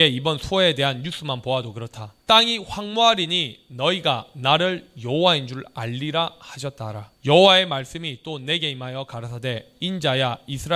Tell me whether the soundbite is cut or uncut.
cut